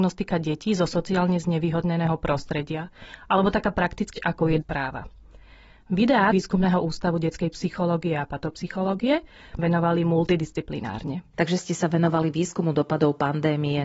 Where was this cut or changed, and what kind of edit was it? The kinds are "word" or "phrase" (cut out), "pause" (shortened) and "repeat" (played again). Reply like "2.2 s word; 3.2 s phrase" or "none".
4.1 s word; 4.6 s word; 6.3 s phrase; 9.6 s phrase